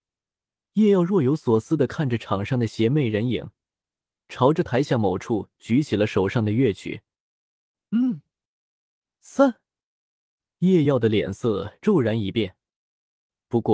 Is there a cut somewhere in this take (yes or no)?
no